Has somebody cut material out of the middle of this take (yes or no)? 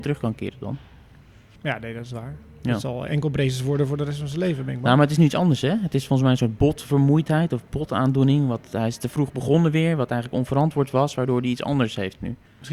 no